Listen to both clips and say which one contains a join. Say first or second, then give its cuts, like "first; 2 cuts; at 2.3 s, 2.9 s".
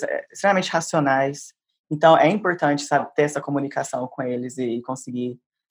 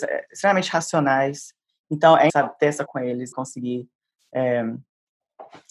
second; 3 cuts; at 2.3 s, 2.9 s, 3.3 s